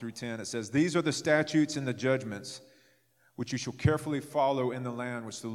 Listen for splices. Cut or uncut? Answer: uncut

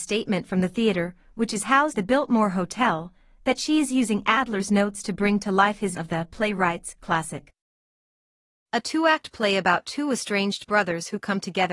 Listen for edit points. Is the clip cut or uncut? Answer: cut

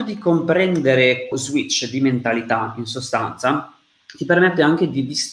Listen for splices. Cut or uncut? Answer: cut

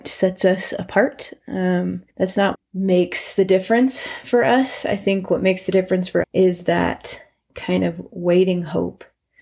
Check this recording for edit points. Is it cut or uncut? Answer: cut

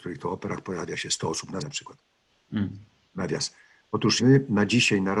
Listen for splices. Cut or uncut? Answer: cut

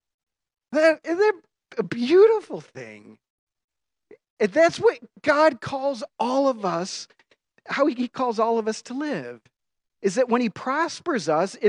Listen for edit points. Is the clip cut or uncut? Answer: uncut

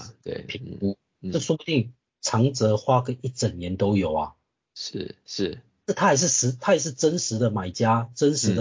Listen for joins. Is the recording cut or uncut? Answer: uncut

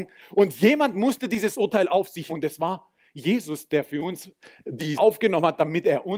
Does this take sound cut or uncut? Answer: cut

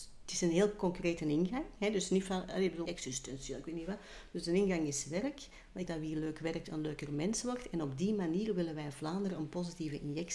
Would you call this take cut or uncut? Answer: cut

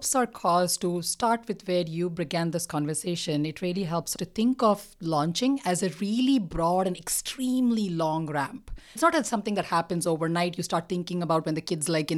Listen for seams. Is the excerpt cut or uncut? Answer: uncut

